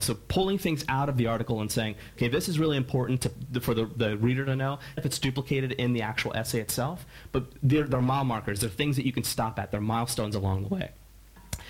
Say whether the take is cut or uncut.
cut